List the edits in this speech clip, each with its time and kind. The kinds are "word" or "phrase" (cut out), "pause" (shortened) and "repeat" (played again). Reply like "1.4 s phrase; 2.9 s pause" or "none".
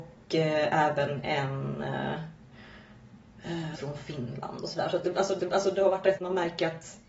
3.8 s word; 5.4 s repeat; 6.2 s word